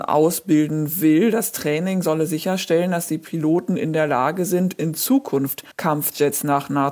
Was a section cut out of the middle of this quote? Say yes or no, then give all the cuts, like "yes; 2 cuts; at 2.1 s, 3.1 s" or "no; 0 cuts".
yes; 1 cut; at 5.7 s